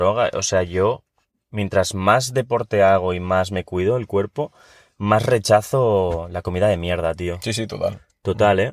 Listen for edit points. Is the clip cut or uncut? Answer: uncut